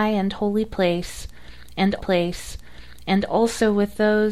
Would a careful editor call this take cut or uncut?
cut